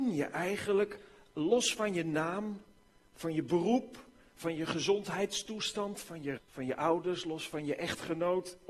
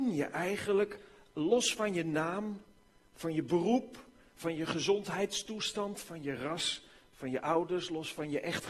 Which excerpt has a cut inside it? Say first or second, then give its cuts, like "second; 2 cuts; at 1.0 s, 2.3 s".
first; 1 cut; at 6.4 s